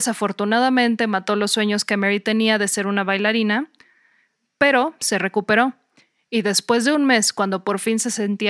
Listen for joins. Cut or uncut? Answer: uncut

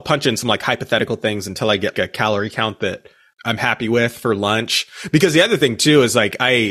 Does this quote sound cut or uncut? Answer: cut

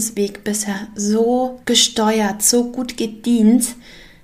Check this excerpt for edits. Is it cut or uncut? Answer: cut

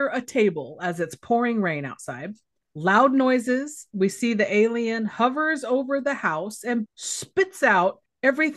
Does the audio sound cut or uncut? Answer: cut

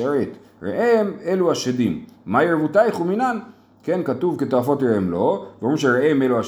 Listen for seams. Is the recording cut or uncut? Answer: uncut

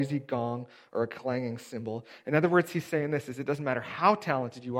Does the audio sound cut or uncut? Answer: uncut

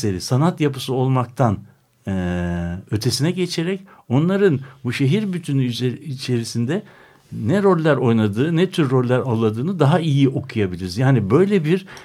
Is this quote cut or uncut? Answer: uncut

